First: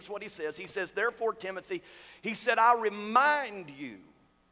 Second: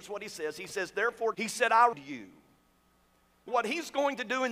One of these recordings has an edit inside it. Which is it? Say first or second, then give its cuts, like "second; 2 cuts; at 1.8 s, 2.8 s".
second; 3 cuts; at 1.3 s, 1.9 s, 3.5 s